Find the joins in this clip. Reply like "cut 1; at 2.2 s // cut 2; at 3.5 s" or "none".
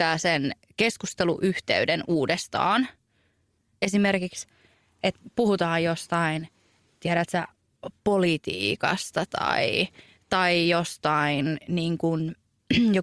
none